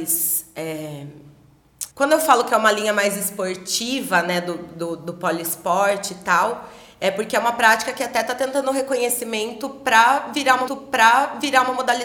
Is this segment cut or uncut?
cut